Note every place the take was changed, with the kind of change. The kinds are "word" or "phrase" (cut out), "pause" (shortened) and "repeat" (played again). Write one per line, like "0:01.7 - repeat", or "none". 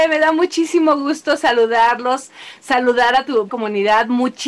0:03.5 - word